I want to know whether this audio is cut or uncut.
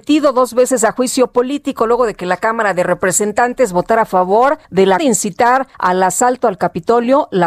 cut